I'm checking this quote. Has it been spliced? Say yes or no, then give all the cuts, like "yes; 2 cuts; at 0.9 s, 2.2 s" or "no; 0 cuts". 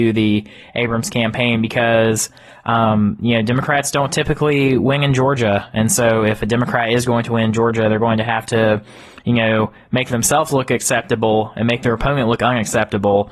no; 0 cuts